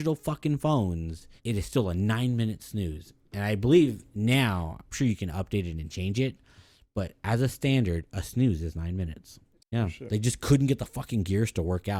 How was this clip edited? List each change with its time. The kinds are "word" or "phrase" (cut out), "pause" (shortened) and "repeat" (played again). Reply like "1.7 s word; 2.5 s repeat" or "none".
1.4 s pause; 4.9 s word; 9.6 s word